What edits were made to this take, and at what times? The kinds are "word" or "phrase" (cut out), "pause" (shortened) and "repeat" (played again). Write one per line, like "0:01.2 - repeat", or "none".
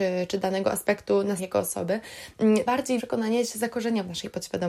0:01.4 - word
0:02.7 - word
0:03.0 - word